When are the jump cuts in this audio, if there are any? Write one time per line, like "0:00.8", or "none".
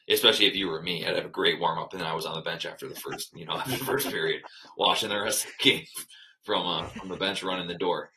none